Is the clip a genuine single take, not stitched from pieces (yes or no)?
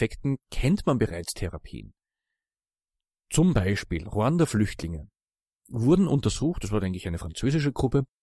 yes